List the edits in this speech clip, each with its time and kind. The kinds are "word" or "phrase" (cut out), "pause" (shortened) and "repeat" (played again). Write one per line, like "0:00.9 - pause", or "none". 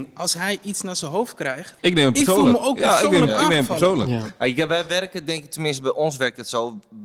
0:01.8 - pause